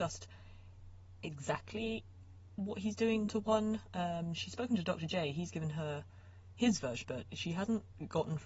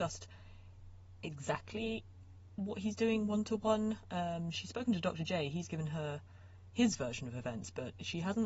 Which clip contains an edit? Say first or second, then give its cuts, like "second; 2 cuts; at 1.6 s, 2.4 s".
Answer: first; 2 cuts; at 3.3 s, 7.0 s